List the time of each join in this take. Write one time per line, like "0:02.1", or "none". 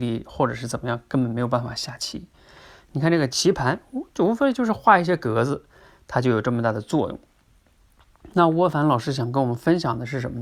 none